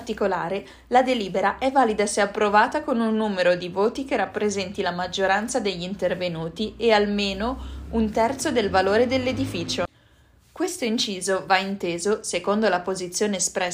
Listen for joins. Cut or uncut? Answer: uncut